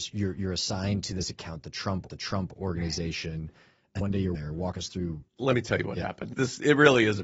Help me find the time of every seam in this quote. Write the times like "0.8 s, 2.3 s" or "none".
2.1 s, 4.0 s, 4.3 s, 5.3 s